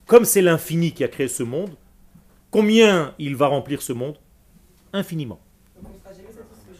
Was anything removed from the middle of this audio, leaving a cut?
no; 0 cuts

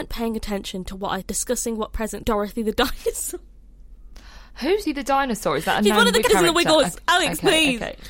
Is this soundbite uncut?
no; 4 cuts; at 1.2 s, 2.2 s, 4.8 s, 6.3 s

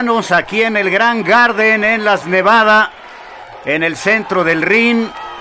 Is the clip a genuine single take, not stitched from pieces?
no; 1 cut; at 2.2 s

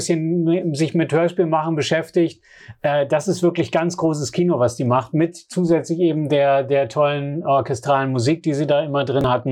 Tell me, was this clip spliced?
no; 0 cuts

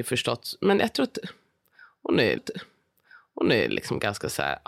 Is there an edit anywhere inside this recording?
yes; 1 cut; at 2.4 s

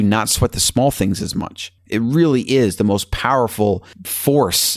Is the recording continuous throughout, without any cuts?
no; 1 cut; at 1.8 s

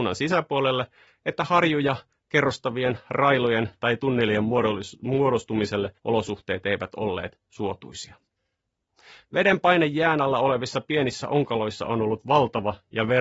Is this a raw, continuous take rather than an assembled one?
no; 1 cut; at 6.0 s

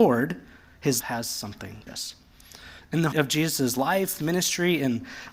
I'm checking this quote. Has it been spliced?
yes; 3 cuts; at 1.0 s, 1.9 s, 3.1 s

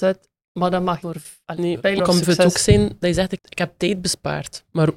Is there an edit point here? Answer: yes; 3 cuts; at 1.0 s, 2.0 s, 3.4 s

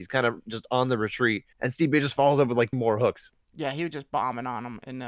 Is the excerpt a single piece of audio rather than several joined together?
no; 2 cuts; at 1.5 s, 2.7 s

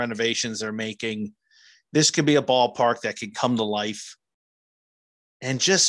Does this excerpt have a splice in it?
no; 0 cuts

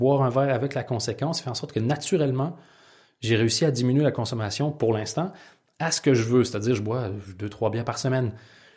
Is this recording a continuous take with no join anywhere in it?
yes; 0 cuts

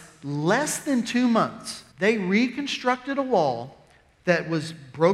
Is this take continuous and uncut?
no; 1 cut; at 1.9 s

